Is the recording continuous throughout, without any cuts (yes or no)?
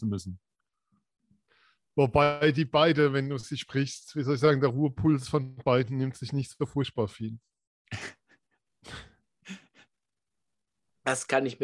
yes